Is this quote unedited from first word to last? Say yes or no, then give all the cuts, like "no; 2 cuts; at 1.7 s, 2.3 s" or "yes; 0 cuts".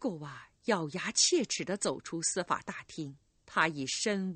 no; 1 cut; at 3.3 s